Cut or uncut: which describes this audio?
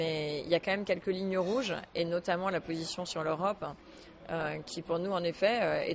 uncut